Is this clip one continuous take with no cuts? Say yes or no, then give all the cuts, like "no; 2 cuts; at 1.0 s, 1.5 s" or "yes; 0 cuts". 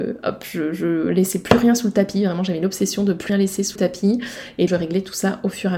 no; 3 cuts; at 3.3 s, 3.8 s, 4.7 s